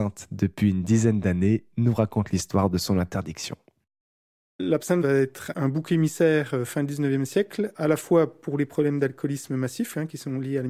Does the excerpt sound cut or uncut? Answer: uncut